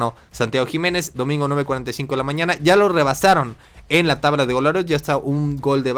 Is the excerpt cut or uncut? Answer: uncut